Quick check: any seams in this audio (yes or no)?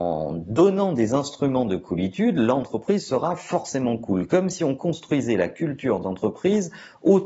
no